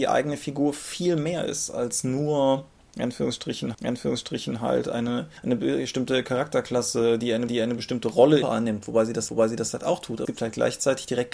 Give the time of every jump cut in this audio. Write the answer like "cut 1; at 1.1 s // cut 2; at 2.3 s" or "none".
cut 1; at 3.7 s // cut 2; at 5.4 s // cut 3; at 7.5 s // cut 4; at 8.4 s // cut 5; at 9.3 s // cut 6; at 10.2 s